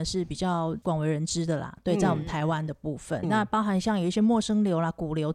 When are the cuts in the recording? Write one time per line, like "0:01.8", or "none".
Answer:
0:03.2